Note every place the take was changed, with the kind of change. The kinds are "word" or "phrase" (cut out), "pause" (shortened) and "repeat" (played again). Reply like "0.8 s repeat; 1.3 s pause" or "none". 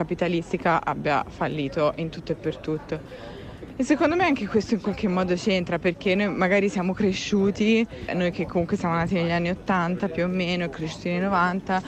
8.1 s word